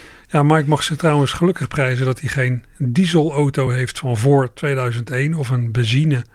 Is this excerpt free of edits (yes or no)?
yes